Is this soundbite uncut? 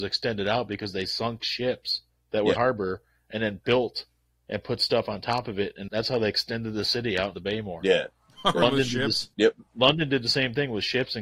no; 6 cuts; at 2.1 s, 2.6 s, 5.9 s, 7.3 s, 8.6 s, 9.3 s

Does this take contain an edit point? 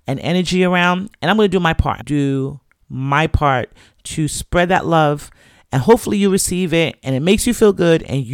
yes; 1 cut; at 2.0 s

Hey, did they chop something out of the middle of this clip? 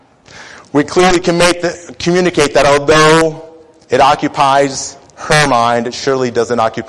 no; 0 cuts

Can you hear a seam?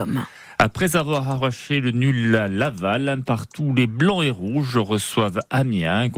no; 0 cuts

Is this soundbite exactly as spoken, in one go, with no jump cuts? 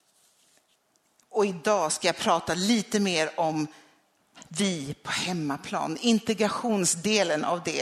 yes; 0 cuts

